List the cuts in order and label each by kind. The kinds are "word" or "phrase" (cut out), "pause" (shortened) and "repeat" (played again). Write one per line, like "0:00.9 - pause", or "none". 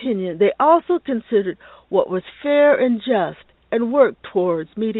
none